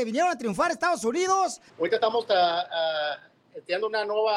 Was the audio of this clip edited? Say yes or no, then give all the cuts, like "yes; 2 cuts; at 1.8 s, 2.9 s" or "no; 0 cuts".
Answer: yes; 1 cut; at 1.7 s